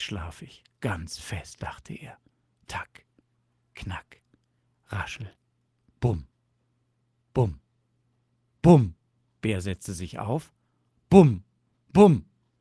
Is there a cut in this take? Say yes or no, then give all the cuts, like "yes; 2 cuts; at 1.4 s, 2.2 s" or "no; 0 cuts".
no; 0 cuts